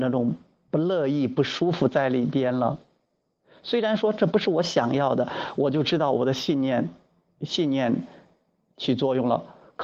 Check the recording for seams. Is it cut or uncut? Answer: uncut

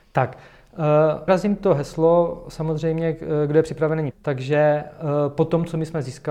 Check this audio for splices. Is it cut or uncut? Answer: cut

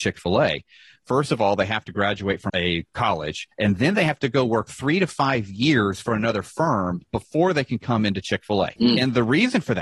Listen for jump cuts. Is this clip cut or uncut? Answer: cut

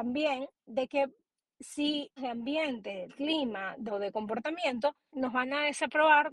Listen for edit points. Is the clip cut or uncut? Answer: cut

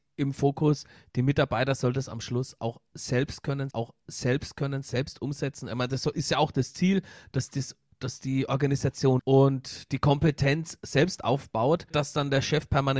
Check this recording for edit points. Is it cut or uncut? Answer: cut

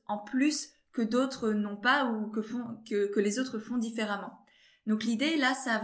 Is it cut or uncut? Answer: uncut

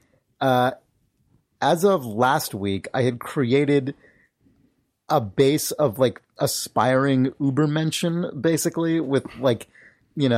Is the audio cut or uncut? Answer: uncut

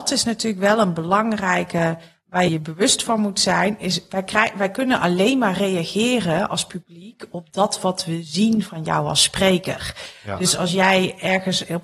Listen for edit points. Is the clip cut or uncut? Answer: cut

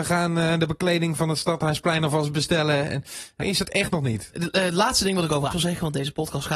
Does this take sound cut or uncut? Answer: cut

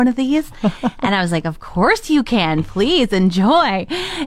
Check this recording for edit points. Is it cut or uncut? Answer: uncut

